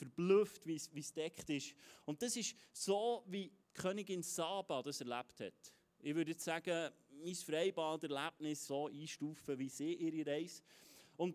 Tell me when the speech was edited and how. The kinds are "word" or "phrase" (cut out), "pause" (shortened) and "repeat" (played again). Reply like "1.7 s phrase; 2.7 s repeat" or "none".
3.6 s pause; 8.7 s phrase

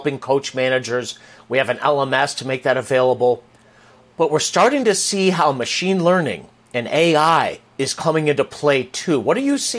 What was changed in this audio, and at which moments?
7.7 s pause

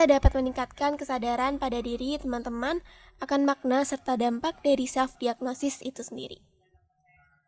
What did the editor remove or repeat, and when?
none

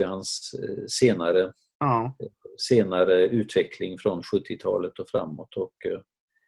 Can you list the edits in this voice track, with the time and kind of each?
none

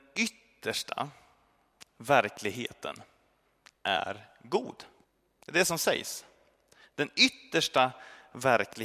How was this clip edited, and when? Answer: 5.0 s pause

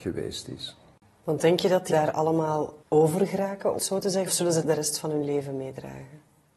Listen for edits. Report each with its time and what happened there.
1.9 s word; 2.8 s pause; 3.8 s word; 4.3 s word; 4.6 s word

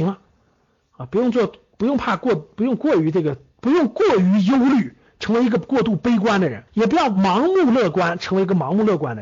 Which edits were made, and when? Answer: 6.7 s pause

